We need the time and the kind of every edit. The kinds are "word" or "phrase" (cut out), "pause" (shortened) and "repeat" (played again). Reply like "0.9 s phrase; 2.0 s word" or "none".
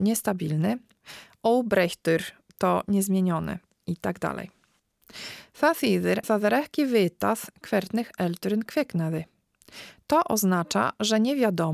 6.2 s word